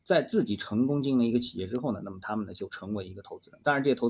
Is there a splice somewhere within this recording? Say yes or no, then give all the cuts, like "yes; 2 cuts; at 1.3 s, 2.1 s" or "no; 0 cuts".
no; 0 cuts